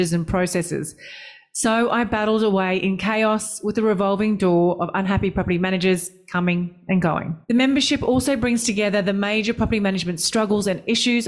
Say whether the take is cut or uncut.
cut